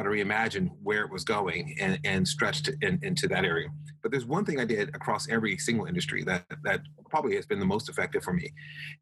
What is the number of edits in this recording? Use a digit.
0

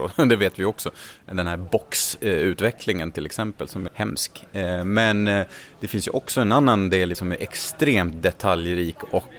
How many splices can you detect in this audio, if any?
2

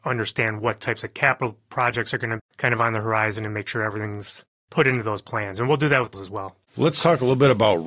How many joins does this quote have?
3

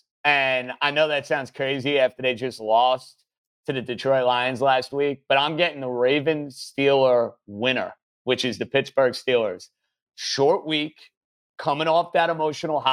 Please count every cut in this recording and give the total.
0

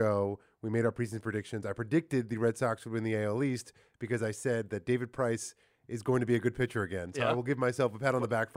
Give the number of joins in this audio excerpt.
0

